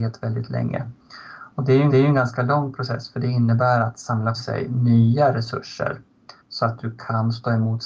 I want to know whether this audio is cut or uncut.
cut